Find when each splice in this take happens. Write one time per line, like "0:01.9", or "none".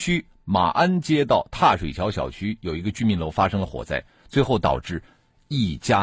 none